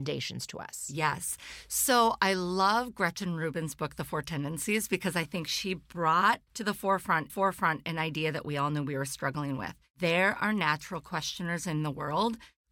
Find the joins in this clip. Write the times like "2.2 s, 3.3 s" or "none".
6.5 s, 7.3 s